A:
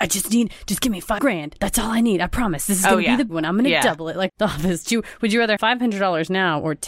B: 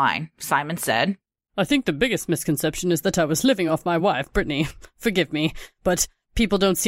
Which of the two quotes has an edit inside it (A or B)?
A